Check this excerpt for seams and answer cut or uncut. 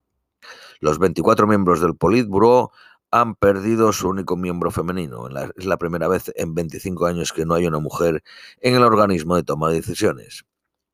uncut